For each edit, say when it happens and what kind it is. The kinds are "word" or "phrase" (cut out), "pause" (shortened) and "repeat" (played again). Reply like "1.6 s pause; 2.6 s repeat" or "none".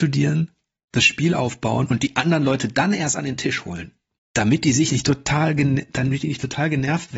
none